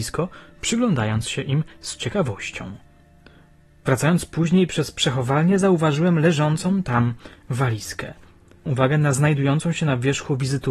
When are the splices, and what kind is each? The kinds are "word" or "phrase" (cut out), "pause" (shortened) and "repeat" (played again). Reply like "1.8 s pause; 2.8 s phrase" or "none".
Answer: 8.7 s word